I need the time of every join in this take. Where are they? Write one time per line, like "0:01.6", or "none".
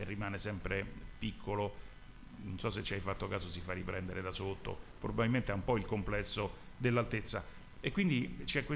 none